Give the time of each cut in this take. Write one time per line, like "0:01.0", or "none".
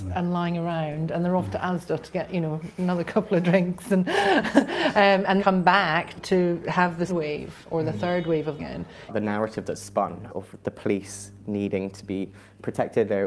0:05.4
0:06.2
0:07.1
0:08.6
0:10.3